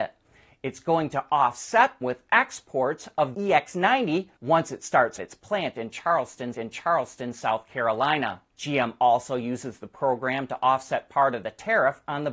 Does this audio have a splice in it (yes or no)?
yes